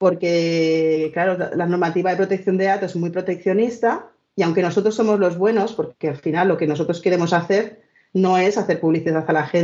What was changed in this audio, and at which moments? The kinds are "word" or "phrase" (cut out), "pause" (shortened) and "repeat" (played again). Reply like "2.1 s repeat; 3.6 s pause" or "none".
none